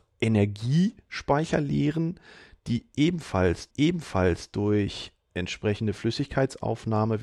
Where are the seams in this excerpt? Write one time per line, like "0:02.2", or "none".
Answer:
0:03.7